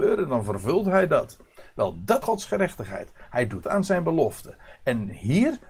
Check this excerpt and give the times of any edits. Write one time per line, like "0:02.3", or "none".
0:02.2
0:03.6